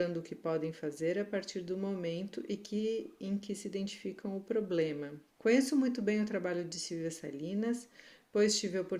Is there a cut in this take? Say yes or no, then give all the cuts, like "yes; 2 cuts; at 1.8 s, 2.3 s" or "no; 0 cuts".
yes; 1 cut; at 5.3 s